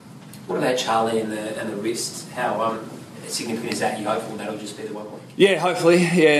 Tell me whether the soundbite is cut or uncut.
uncut